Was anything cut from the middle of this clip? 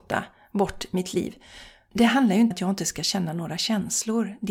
yes; 1 cut; at 2.5 s

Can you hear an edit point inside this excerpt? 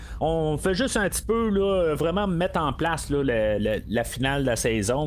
no; 0 cuts

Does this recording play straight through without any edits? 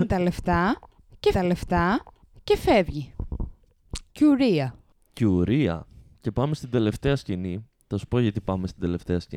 no; 1 cut; at 1.3 s

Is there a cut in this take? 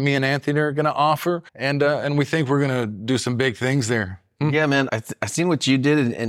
yes; 2 cuts; at 1.5 s, 4.9 s

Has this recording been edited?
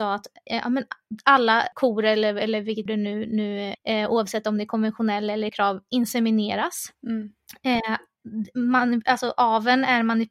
yes; 4 cuts; at 2.9 s, 3.7 s, 5.5 s, 6.9 s

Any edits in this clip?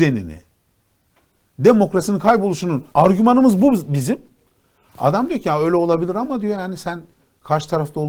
yes; 1 cut; at 2.9 s

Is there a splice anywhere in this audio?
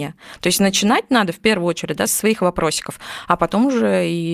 yes; 1 cut; at 2.1 s

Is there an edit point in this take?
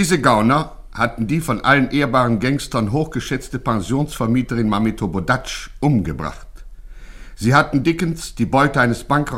no; 0 cuts

